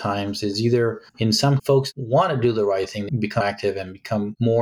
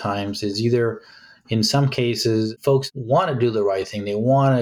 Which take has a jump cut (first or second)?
first